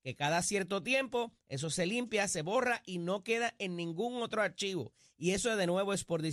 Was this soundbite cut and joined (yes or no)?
no